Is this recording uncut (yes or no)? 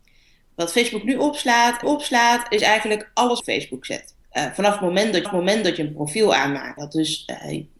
no